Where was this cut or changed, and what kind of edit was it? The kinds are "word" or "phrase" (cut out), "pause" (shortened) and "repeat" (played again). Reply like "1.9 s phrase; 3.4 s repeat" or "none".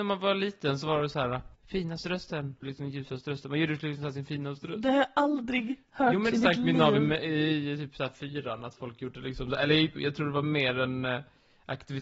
1.5 s pause; 2.6 s phrase; 6.3 s phrase; 10.0 s word

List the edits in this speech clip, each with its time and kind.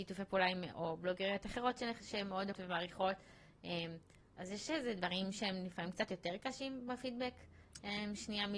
2.5 s word

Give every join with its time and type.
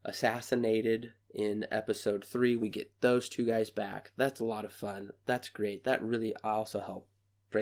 1.2 s pause

